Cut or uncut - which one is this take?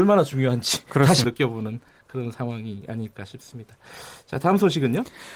cut